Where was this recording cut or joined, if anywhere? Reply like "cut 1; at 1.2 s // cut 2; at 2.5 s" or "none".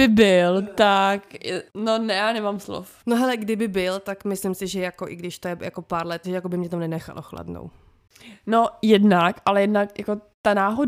cut 1; at 1.7 s // cut 2; at 3.0 s // cut 3; at 6.2 s

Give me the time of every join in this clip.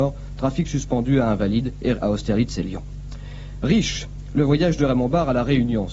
cut 1; at 1.9 s

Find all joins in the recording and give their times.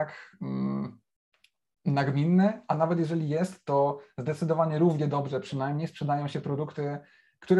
none

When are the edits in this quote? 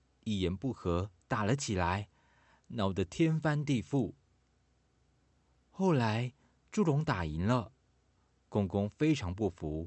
none

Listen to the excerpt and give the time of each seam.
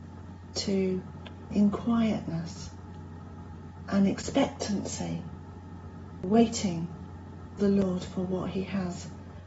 cut 1; at 1.5 s // cut 2; at 7.6 s

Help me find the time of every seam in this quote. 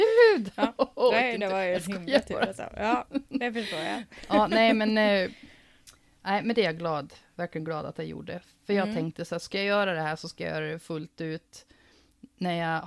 none

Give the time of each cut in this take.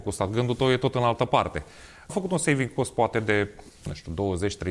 cut 1; at 2.1 s // cut 2; at 3.7 s

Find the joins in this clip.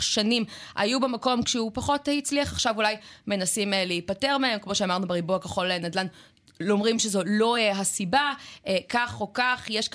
none

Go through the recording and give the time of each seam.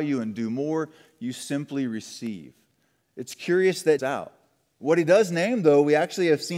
cut 1; at 4.0 s

